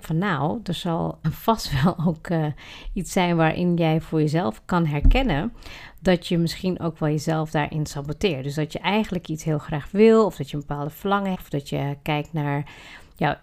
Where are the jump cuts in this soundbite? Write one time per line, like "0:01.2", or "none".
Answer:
0:01.2
0:11.3